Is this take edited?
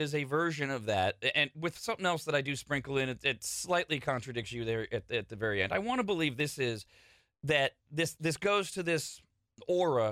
no; 0 cuts

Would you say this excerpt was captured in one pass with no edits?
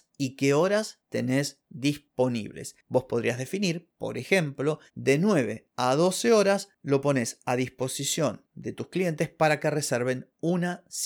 no; 1 cut; at 4.9 s

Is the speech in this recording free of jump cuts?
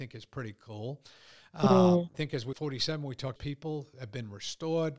no; 3 cuts; at 2.1 s, 2.5 s, 3.4 s

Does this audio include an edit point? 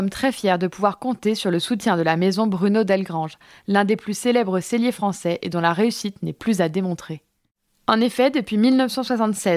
no; 0 cuts

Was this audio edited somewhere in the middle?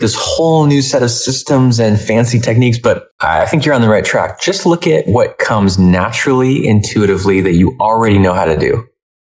no; 0 cuts

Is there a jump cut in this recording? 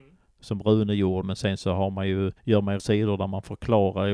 yes; 3 cuts; at 1.2 s, 2.4 s, 2.8 s

